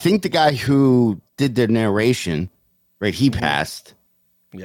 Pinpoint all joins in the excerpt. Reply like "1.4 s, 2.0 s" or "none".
none